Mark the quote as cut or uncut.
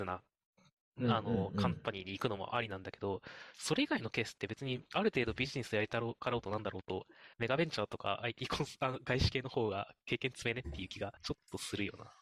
cut